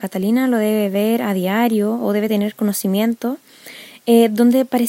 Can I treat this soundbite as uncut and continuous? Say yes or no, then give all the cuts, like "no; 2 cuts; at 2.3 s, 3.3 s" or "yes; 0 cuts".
yes; 0 cuts